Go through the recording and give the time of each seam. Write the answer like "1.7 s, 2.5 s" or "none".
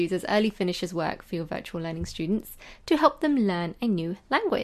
none